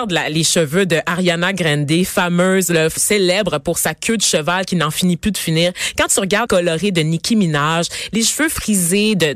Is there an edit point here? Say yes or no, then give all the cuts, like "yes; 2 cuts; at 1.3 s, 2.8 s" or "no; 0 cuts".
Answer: yes; 2 cuts; at 3.0 s, 6.5 s